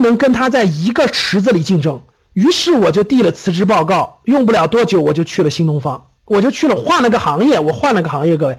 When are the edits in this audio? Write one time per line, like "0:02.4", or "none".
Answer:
0:02.1
0:06.2